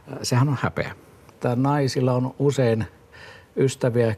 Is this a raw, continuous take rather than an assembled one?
yes; 0 cuts

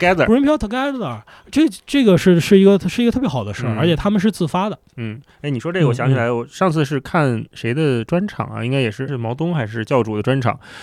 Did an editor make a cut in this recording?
yes; 1 cut; at 9.1 s

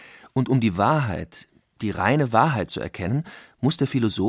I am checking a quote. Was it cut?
no; 0 cuts

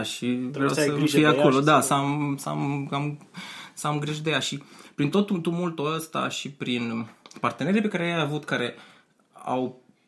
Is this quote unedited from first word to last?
yes; 0 cuts

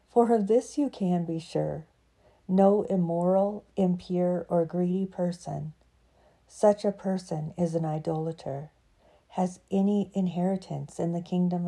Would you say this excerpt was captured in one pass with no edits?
yes; 0 cuts

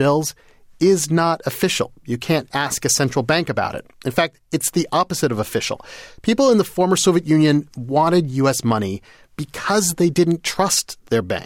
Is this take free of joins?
yes; 0 cuts

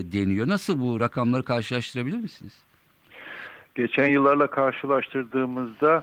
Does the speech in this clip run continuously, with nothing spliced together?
yes; 0 cuts

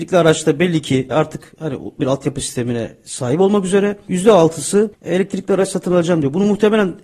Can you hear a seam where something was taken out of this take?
yes; 1 cut; at 2.0 s

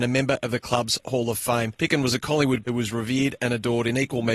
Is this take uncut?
no; 1 cut; at 2.6 s

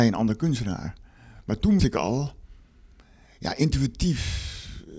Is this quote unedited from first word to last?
no; 1 cut; at 1.8 s

